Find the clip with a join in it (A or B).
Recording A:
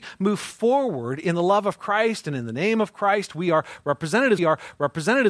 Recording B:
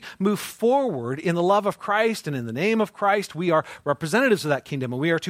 A